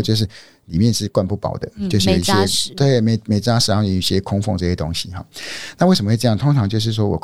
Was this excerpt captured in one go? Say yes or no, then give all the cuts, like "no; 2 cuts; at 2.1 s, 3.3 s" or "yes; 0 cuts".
yes; 0 cuts